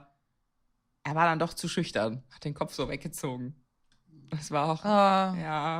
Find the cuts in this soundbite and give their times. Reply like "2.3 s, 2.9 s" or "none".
none